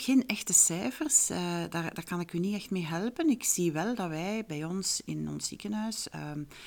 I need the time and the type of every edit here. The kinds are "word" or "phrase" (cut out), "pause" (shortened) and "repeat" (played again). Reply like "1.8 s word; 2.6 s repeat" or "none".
none